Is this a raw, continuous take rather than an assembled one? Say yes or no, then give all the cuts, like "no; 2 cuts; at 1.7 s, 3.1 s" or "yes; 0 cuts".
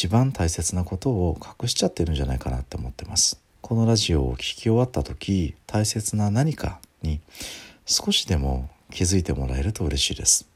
no; 2 cuts; at 3.5 s, 5.6 s